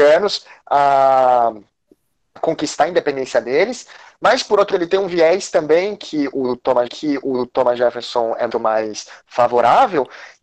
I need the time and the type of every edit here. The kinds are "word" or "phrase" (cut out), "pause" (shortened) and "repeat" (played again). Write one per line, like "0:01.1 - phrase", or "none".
0:02.4 - word
0:04.7 - word
0:06.9 - repeat
0:08.5 - word